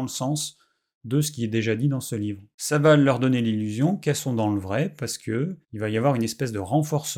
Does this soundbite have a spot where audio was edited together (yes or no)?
yes